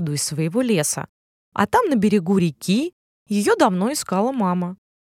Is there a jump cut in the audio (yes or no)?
no